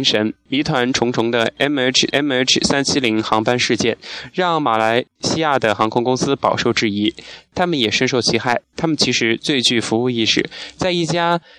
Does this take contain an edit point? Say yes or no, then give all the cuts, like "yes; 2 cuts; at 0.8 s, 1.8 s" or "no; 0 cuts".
yes; 2 cuts; at 2.1 s, 5.1 s